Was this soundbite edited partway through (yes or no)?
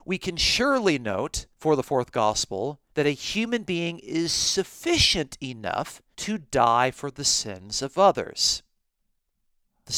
yes